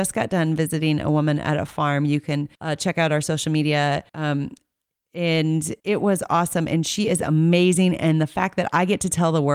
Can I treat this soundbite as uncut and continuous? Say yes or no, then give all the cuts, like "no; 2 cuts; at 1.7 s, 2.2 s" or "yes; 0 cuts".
no; 3 cuts; at 2.5 s, 4.1 s, 5.8 s